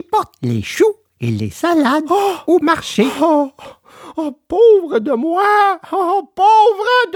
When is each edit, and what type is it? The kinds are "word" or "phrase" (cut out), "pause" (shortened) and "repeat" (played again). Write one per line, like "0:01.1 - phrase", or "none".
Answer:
none